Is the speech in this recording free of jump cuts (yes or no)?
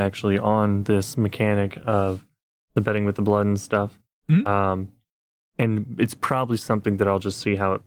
yes